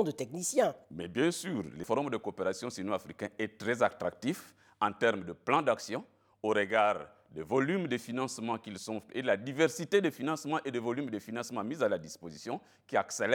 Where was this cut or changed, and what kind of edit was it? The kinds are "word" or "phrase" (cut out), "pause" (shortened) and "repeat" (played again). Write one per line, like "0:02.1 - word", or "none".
none